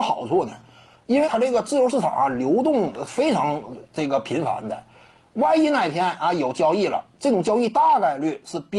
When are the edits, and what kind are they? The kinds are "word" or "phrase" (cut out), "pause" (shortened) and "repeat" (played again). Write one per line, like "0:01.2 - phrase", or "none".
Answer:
0:01.2 - word